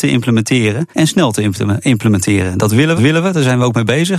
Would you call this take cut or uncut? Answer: cut